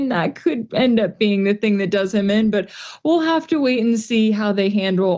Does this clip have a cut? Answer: no; 0 cuts

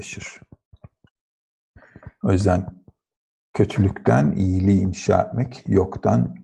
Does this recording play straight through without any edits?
yes; 0 cuts

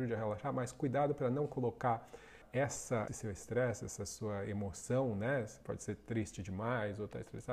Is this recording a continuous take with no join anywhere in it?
no; 2 cuts; at 2.4 s, 3.1 s

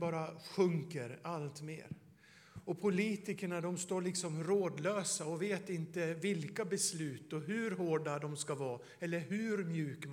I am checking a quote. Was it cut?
no; 0 cuts

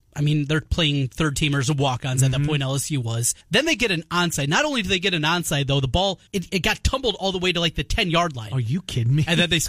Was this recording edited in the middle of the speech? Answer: yes; 2 cuts; at 3.4 s, 6.3 s

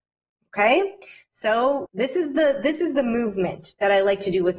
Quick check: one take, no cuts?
no; 1 cut; at 1.9 s

